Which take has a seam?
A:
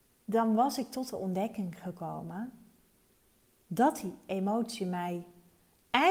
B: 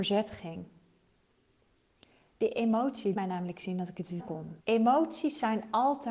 B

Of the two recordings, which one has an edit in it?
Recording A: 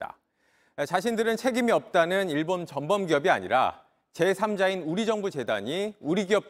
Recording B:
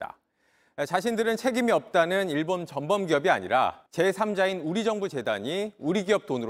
B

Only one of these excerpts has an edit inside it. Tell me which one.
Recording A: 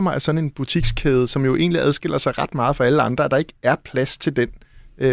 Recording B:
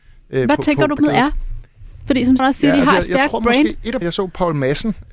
B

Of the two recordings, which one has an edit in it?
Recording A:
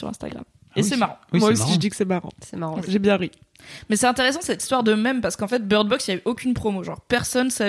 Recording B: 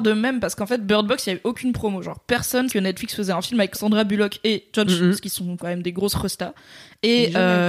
B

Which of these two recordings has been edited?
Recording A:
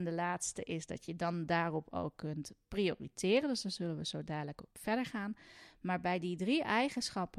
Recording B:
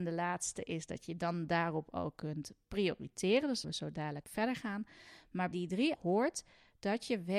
B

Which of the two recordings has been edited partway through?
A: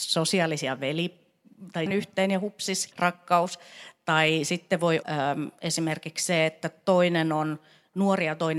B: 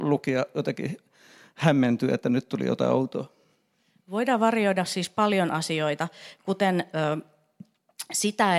A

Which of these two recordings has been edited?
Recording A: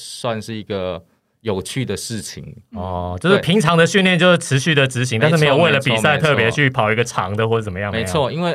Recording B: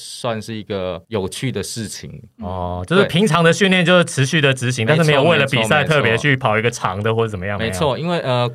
B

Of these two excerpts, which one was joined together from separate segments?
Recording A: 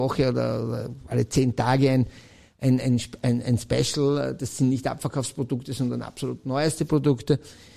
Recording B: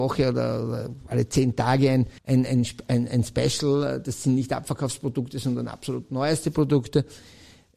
B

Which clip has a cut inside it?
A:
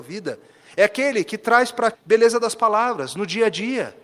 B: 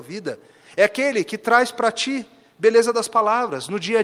A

